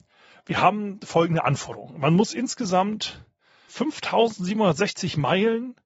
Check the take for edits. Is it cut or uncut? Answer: cut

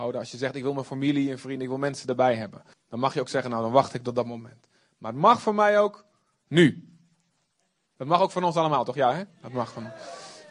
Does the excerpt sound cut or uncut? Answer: cut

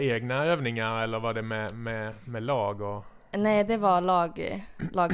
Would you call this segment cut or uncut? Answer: uncut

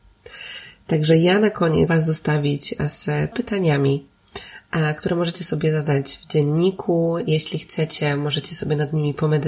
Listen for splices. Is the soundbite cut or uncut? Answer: cut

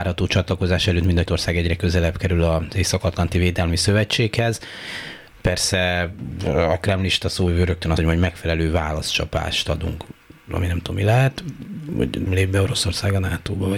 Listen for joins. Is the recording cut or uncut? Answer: cut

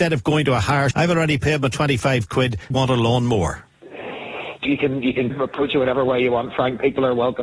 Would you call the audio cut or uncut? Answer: cut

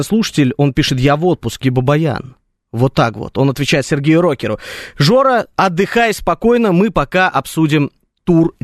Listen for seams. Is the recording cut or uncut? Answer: cut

